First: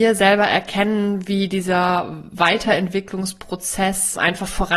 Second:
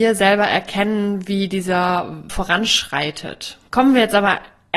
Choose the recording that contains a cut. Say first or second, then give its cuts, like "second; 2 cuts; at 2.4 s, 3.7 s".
second; 1 cut; at 2.3 s